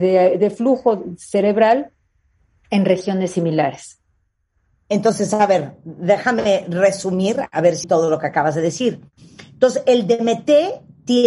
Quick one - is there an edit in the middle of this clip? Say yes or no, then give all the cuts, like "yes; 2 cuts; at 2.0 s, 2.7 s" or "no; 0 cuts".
yes; 1 cut; at 7.8 s